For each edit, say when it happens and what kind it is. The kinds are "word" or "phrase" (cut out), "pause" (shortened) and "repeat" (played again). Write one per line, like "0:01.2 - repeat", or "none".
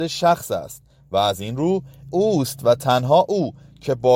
0:02.1 - word